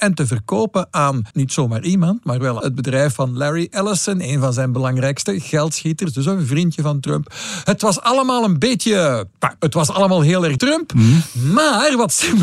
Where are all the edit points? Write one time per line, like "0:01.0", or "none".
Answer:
0:01.3
0:02.6
0:09.6
0:10.6